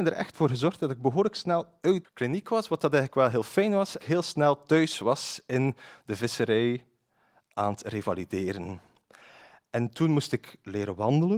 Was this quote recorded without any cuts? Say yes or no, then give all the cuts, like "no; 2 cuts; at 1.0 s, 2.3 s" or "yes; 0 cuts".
no; 2 cuts; at 2.0 s, 4.0 s